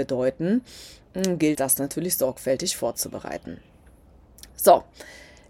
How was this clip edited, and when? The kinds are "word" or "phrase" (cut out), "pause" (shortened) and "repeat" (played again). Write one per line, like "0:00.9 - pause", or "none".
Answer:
0:01.5 - word

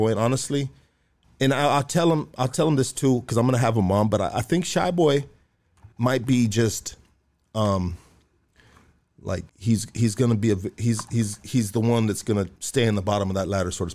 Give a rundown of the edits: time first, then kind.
0:05.9 - pause
0:09.5 - pause
0:12.6 - pause

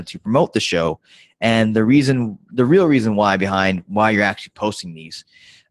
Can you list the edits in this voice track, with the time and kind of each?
none

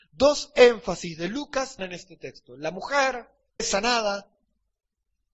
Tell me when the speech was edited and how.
0:01.8 - word
0:03.6 - word

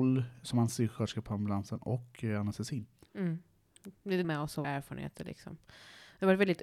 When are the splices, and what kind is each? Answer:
0:04.2 - word
0:04.6 - word

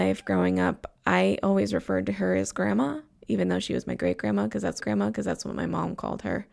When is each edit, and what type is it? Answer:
0:04.8 - repeat

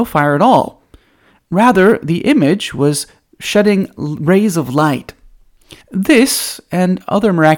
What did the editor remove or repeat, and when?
0:05.8 - pause

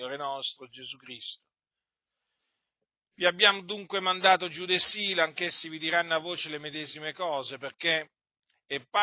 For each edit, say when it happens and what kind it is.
none

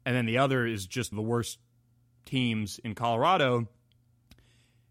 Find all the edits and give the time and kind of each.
0:01.1 - word

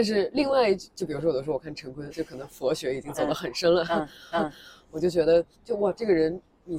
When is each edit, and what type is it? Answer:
0:02.1 - word
0:04.3 - repeat
0:05.5 - pause

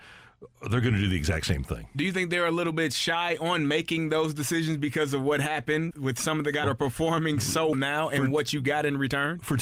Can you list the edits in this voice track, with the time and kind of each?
0:05.9 - word
0:06.6 - word
0:07.7 - word

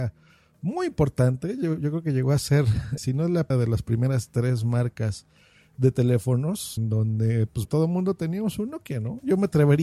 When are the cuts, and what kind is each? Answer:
0:03.0 - word
0:03.5 - word
0:06.8 - word
0:07.7 - word

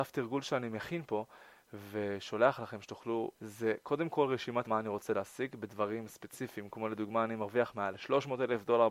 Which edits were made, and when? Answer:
0:03.3 - phrase
0:04.6 - word

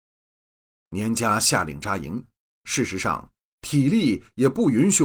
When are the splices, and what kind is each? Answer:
0:02.4 - pause

